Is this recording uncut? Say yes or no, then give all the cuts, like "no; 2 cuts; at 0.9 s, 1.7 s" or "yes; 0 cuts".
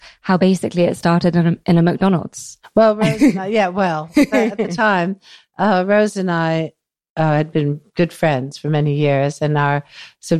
yes; 0 cuts